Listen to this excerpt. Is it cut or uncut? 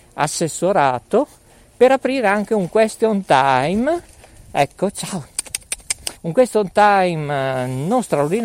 cut